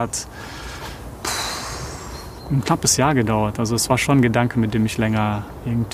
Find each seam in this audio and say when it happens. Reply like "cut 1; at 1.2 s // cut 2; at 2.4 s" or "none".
none